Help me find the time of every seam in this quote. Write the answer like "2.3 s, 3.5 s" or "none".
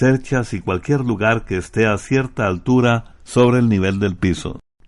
none